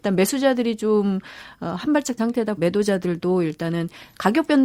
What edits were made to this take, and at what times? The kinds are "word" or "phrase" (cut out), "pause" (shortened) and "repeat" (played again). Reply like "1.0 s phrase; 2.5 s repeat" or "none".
2.2 s phrase; 2.6 s word